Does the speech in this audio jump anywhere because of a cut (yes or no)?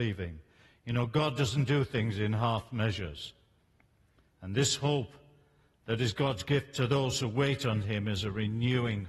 no